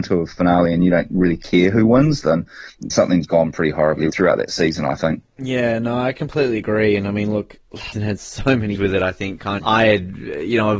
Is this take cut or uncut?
cut